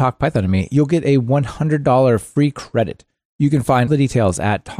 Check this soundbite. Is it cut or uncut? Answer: cut